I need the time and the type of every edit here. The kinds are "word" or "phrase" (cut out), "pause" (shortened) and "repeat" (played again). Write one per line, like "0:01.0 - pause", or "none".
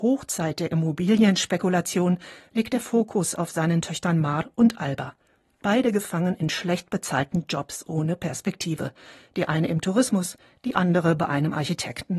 none